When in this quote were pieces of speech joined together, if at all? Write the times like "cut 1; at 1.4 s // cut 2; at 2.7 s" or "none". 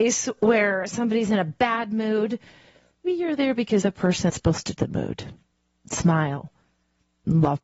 cut 1; at 3.0 s // cut 2; at 3.8 s // cut 3; at 4.3 s // cut 4; at 4.8 s

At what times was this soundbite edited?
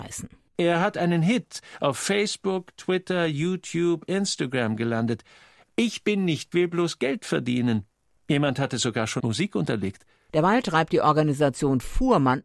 cut 1; at 6.5 s // cut 2; at 9.2 s

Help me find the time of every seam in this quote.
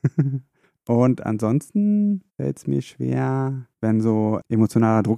cut 1; at 2.3 s // cut 2; at 3.7 s

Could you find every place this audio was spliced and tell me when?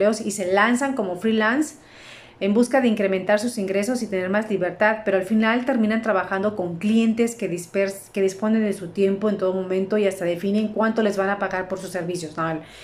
none

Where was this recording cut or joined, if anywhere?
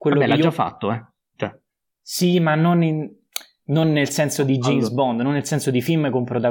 none

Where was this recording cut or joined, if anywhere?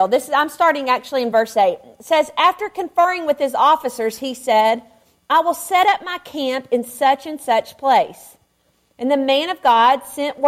none

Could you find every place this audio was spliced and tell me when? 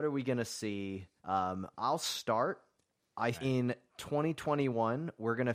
cut 1; at 1.2 s // cut 2; at 3.3 s

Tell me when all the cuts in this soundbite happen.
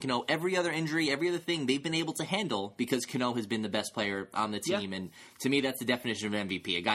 none

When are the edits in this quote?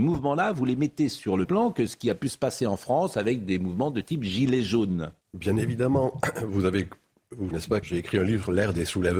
cut 1; at 1.4 s // cut 2; at 5.2 s // cut 3; at 7.5 s // cut 4; at 7.8 s

